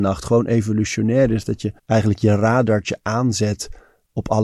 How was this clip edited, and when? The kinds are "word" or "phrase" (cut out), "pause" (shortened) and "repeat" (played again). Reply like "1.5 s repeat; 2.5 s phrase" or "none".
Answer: 1.8 s pause